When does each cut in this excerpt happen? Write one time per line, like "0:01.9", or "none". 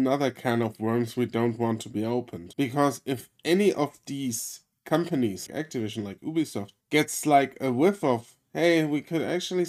0:05.5
0:06.8